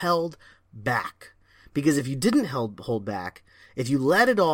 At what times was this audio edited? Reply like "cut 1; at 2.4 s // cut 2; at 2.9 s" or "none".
none